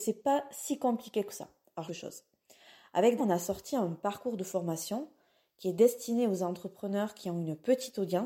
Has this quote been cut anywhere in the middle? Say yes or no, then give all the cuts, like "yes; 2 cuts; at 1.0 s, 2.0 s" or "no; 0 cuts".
yes; 2 cuts; at 1.9 s, 3.2 s